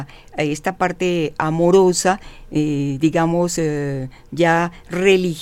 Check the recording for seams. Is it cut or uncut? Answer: uncut